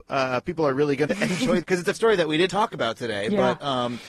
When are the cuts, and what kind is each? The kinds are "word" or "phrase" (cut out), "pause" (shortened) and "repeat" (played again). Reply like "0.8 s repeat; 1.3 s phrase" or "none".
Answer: 1.1 s word; 1.6 s phrase; 1.9 s word; 2.5 s word